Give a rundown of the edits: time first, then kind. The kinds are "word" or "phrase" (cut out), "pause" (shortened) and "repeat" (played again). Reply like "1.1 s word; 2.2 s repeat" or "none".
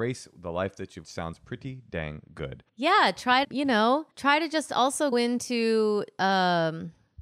1.0 s phrase; 2.7 s pause; 3.4 s word; 4.1 s pause; 5.1 s word